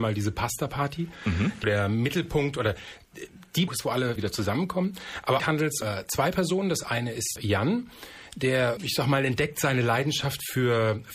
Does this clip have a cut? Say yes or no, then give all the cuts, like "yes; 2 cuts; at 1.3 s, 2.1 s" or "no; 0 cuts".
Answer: yes; 7 cuts; at 1.6 s, 3.7 s, 4.2 s, 5.4 s, 5.8 s, 7.4 s, 8.8 s